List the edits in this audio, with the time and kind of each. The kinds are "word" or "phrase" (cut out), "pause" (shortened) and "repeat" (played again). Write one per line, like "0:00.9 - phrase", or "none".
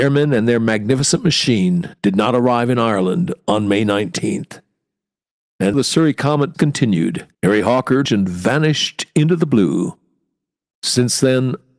0:02.0 - pause
0:05.7 - word
0:06.5 - word
0:07.3 - pause
0:08.1 - phrase